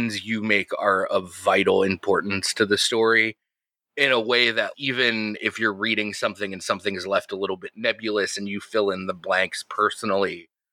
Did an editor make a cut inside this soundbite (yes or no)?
yes